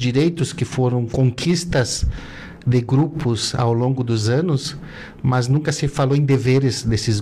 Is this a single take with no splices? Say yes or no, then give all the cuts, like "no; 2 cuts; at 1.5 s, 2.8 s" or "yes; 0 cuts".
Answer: yes; 0 cuts